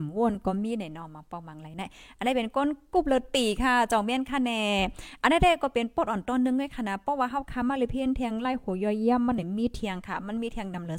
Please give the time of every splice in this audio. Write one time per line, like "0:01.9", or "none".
none